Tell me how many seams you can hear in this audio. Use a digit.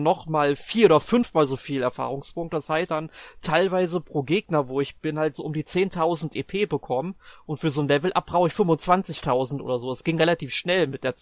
2